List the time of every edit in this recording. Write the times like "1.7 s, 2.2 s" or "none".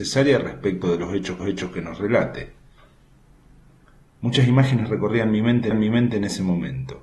1.4 s, 5.7 s